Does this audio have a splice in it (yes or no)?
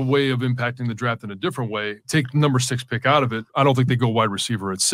yes